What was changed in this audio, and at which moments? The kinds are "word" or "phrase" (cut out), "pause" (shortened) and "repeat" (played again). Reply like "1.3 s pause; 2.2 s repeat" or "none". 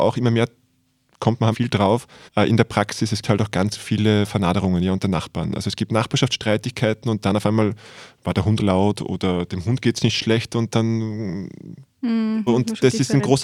1.5 s word; 2.3 s pause; 3.2 s word; 8.6 s word; 12.5 s word